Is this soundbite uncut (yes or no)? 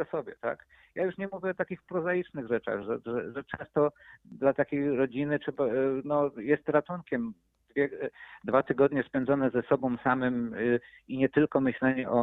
yes